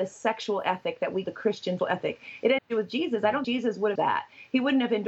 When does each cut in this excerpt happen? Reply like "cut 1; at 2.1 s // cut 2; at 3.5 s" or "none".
cut 1; at 1.2 s // cut 2; at 1.8 s // cut 3; at 2.6 s // cut 4; at 3.4 s // cut 5; at 4.0 s